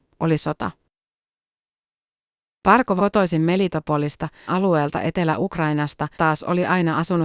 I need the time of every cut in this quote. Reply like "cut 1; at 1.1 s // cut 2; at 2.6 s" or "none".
cut 1; at 3.0 s // cut 2; at 4.5 s // cut 3; at 6.1 s